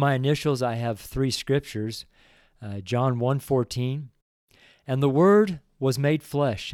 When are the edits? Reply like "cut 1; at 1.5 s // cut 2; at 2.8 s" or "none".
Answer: none